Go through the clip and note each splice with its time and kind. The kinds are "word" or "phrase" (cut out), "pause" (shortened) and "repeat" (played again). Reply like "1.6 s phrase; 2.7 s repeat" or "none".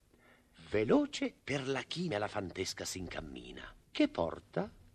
1.4 s pause; 2.1 s word; 3.8 s pause